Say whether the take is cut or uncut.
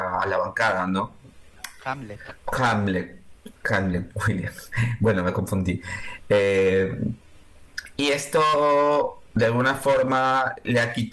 uncut